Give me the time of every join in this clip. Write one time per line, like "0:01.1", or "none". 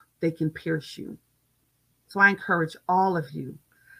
none